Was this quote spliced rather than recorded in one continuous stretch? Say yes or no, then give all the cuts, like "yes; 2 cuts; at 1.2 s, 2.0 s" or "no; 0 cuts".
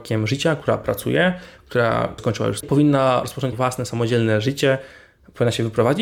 yes; 3 cuts; at 2.2 s, 2.6 s, 3.5 s